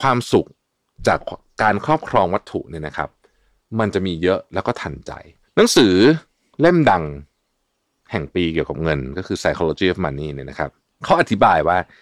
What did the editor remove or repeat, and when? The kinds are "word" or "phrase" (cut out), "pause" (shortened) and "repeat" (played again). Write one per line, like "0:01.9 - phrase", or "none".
none